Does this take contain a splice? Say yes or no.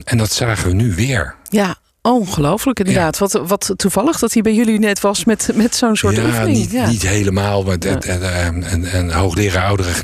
no